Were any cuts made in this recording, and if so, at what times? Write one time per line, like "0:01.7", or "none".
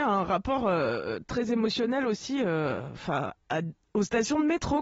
none